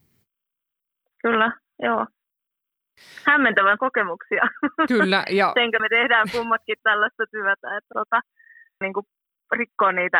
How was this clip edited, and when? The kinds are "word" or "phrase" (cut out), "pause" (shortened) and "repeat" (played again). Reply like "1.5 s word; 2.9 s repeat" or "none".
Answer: 3.8 s word; 5.8 s word; 6.8 s word; 7.9 s word; 8.8 s word